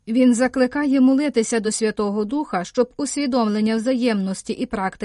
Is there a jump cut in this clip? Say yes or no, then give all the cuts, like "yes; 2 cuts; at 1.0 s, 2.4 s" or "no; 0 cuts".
no; 0 cuts